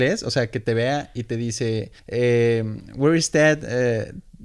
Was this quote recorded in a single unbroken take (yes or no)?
no